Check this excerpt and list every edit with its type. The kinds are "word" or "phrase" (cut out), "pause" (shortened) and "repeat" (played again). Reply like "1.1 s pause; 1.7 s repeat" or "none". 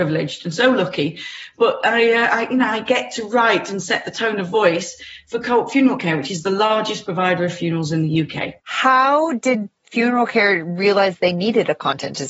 8.6 s pause